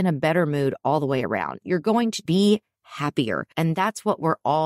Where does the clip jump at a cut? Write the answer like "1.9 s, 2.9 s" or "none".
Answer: 2.3 s, 3.5 s